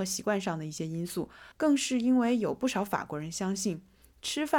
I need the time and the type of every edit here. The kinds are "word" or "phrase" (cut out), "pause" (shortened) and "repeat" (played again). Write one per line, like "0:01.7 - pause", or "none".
0:01.5 - pause